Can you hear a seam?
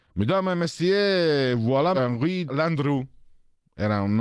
yes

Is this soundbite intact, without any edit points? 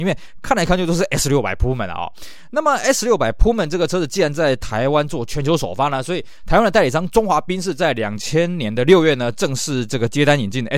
yes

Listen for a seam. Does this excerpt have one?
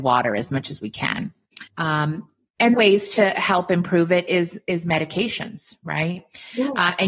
yes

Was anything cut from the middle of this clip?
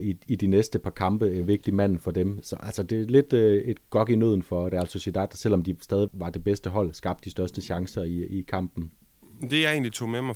yes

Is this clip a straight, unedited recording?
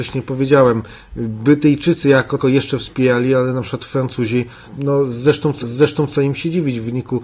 no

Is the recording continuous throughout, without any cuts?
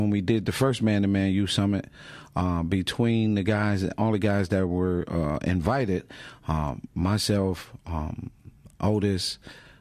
yes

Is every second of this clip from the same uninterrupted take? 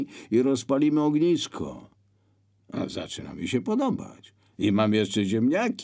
yes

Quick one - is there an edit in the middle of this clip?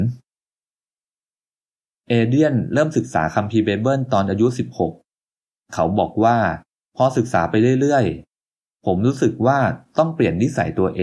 yes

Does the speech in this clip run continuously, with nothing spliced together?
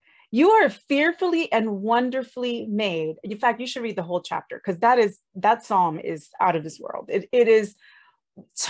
yes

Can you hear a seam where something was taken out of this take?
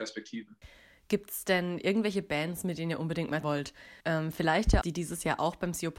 yes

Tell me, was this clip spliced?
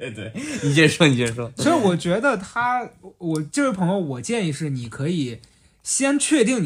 no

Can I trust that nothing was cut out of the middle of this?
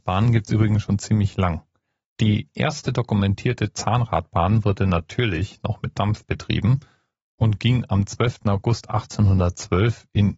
yes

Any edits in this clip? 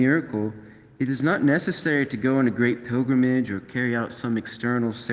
no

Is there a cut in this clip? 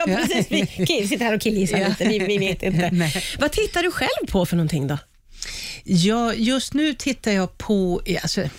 no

